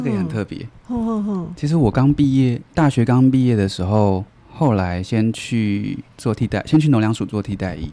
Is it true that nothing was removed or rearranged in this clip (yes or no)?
no